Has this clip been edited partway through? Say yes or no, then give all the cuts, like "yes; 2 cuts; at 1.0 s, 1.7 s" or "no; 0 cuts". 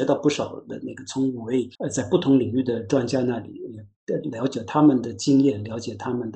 yes; 1 cut; at 1.7 s